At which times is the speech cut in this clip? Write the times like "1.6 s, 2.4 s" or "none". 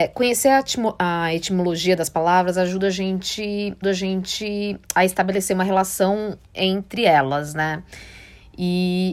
3.8 s